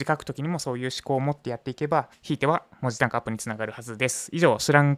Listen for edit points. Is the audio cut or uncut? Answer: cut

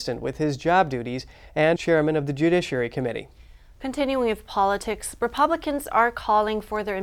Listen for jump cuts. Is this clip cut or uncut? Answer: cut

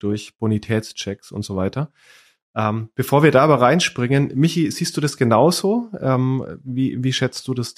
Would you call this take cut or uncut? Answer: uncut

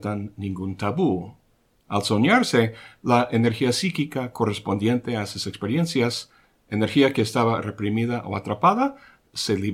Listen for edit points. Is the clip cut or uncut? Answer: uncut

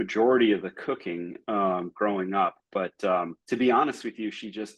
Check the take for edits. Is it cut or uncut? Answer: cut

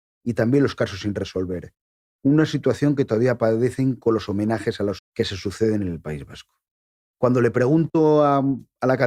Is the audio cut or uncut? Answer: cut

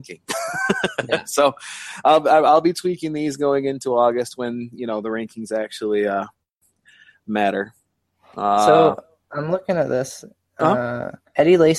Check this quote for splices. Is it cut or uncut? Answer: uncut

